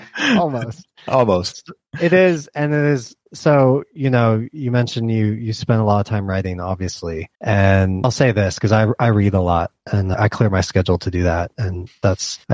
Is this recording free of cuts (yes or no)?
no